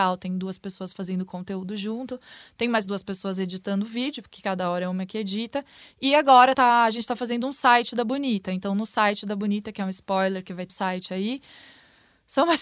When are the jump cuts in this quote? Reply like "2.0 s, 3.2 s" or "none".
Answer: 6.5 s, 10.7 s